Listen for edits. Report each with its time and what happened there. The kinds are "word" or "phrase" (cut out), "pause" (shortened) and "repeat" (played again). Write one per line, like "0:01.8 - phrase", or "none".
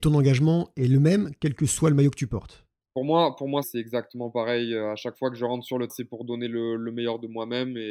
0:03.6 - word
0:05.9 - word